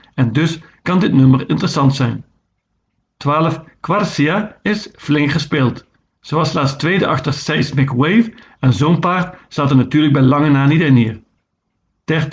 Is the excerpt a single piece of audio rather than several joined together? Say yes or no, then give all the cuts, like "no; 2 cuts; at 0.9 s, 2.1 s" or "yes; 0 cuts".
yes; 0 cuts